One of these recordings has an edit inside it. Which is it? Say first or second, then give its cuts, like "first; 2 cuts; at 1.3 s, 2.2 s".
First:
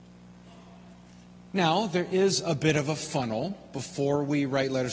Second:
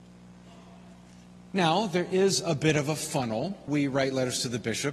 second; 1 cut; at 3.7 s